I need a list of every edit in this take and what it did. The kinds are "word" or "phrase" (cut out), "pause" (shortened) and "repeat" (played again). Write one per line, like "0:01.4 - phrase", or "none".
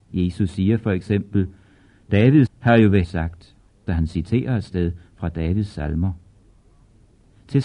0:02.5 - word
0:03.0 - word
0:03.9 - word